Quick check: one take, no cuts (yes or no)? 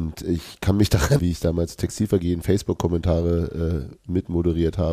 no